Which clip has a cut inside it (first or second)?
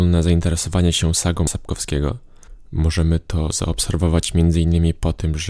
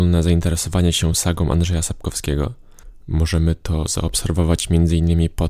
first